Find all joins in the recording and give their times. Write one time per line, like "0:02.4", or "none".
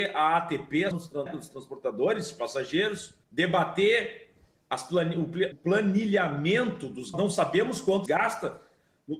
0:00.9
0:01.3
0:03.2
0:05.5
0:07.1
0:08.1